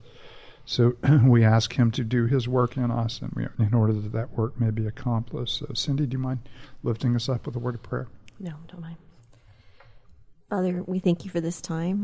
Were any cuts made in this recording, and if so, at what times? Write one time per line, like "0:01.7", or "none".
0:03.5